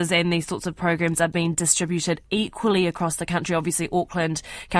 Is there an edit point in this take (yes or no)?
no